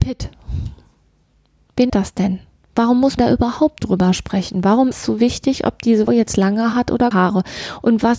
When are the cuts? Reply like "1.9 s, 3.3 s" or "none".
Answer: 1.9 s, 3.2 s, 3.8 s, 4.9 s, 6.1 s, 6.7 s, 7.1 s